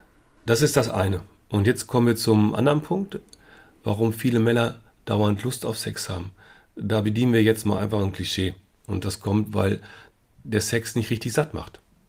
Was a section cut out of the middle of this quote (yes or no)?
no